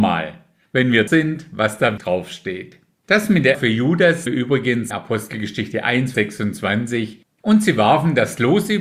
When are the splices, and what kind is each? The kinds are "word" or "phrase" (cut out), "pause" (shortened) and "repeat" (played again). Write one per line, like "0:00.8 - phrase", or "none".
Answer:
0:01.1 - word
0:02.0 - word
0:03.5 - word
0:04.3 - word
0:04.9 - word
0:06.1 - word